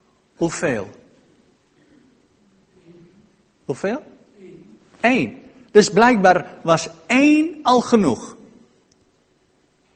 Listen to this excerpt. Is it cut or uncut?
uncut